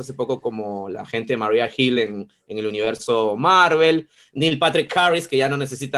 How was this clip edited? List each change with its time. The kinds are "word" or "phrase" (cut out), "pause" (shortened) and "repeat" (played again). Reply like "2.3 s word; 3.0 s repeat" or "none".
none